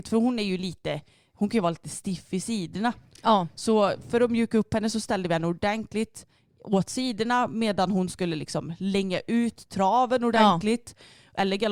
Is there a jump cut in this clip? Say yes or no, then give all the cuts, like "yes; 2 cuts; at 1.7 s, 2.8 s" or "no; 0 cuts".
no; 0 cuts